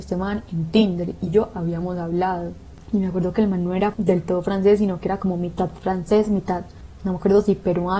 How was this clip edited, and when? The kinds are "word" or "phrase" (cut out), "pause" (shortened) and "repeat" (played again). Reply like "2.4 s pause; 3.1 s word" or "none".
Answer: 1.3 s word

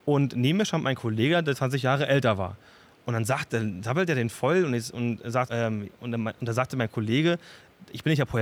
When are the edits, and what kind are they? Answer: 5.5 s word

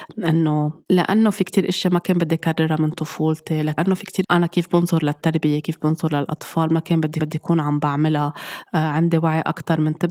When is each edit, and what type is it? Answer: 4.2 s word; 7.2 s repeat

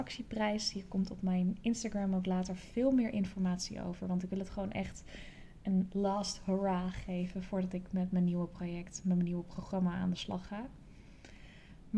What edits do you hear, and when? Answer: none

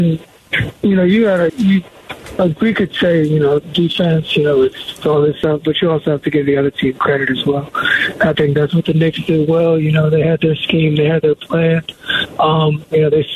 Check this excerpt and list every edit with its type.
1.5 s word

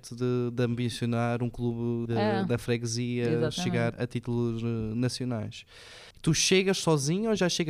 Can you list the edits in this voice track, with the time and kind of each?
2.1 s word; 3.9 s word; 6.1 s pause

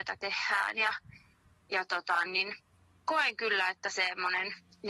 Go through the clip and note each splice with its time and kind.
2.3 s word

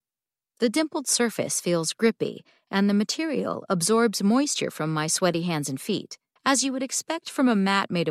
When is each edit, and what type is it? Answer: 6.4 s pause

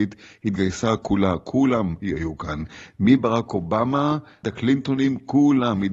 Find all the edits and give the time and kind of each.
4.4 s word

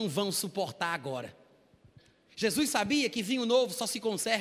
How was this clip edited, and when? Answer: none

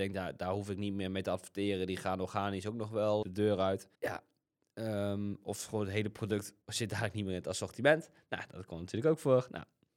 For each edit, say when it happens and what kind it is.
3.2 s word; 3.9 s pause; 6.6 s pause

